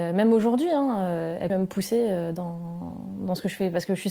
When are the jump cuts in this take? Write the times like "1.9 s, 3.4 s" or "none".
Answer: 1.5 s